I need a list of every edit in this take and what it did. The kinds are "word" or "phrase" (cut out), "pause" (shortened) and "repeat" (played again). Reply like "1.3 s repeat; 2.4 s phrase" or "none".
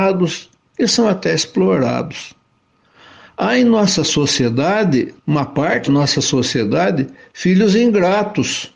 5.2 s pause; 5.9 s word